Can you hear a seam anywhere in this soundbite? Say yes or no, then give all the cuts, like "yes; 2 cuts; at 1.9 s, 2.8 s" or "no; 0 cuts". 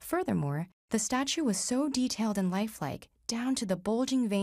no; 0 cuts